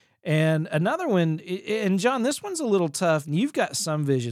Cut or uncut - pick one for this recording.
uncut